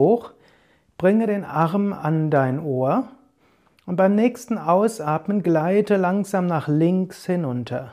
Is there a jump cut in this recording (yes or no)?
no